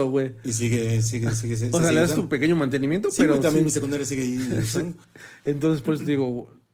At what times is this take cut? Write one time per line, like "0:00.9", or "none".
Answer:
none